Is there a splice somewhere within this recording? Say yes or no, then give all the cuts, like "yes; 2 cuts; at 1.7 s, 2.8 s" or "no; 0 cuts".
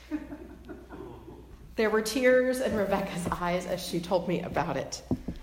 no; 0 cuts